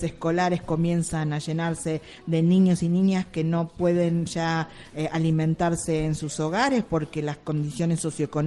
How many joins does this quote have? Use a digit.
0